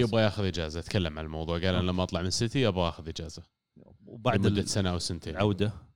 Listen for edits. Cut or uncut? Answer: uncut